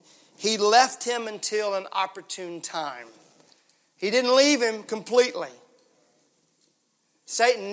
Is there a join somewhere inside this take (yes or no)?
no